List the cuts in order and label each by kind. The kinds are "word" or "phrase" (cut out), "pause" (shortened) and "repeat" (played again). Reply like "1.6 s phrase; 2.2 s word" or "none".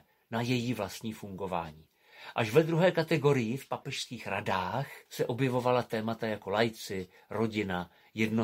5.1 s pause